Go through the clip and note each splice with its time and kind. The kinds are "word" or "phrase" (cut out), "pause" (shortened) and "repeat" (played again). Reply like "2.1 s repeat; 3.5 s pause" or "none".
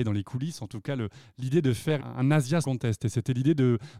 2.0 s word; 2.6 s word